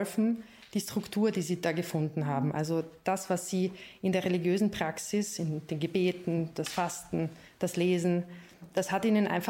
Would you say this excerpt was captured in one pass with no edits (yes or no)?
yes